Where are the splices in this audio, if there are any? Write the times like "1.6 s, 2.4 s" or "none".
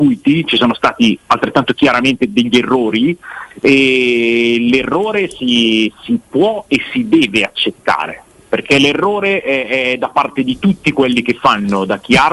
none